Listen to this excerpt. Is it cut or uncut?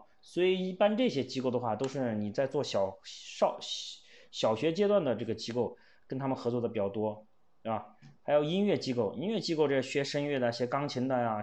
uncut